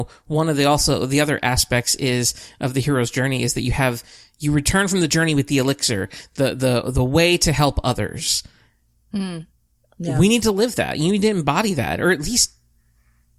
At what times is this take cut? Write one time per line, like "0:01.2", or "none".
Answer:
none